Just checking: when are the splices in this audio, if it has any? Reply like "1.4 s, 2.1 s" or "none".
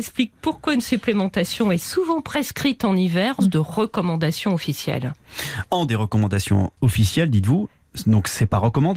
3.4 s, 5.9 s

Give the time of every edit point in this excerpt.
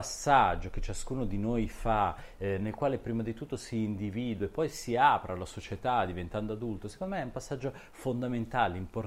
none

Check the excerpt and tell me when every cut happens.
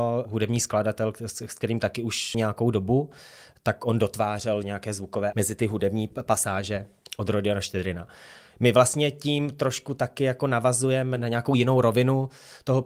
2.3 s, 4.6 s, 5.3 s

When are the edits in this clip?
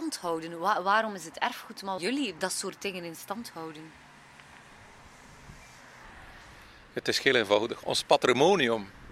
2.0 s, 2.4 s

